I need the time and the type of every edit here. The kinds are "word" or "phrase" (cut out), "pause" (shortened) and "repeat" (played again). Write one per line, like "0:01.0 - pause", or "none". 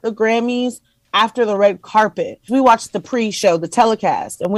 0:02.5 - word